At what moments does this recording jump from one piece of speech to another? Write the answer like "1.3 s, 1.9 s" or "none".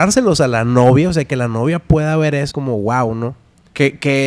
2.5 s